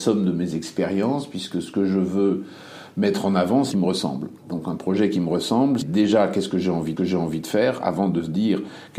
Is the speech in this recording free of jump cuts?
no; 3 cuts; at 3.7 s, 5.8 s, 7.0 s

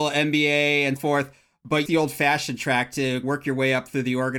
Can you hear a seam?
yes; 3 cuts; at 1.0 s, 1.8 s, 3.2 s

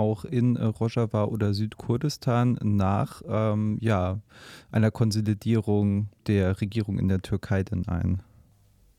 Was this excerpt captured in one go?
no; 1 cut; at 6.2 s

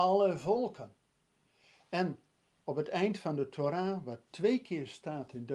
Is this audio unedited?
yes; 0 cuts

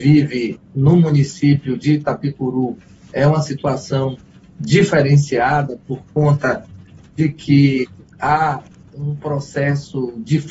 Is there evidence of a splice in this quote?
no; 0 cuts

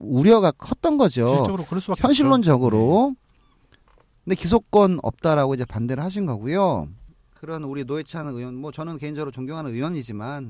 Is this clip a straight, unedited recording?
yes; 0 cuts

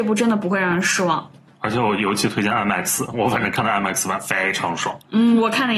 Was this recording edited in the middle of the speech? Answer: no; 0 cuts

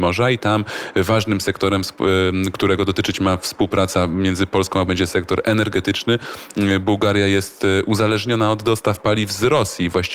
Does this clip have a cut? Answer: yes; 1 cut; at 4.9 s

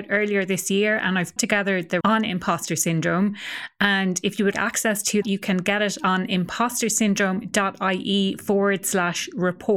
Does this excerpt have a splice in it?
yes; 4 cuts; at 1.4 s, 2.0 s, 4.5 s, 5.2 s

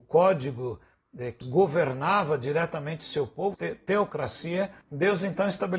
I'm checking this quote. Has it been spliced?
yes; 3 cuts; at 1.4 s, 3.5 s, 4.8 s

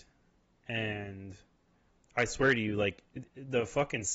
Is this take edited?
no; 0 cuts

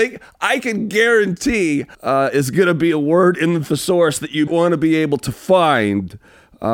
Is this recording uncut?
no; 2 cuts; at 1.9 s, 4.5 s

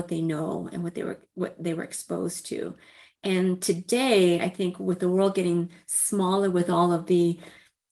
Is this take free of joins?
yes; 0 cuts

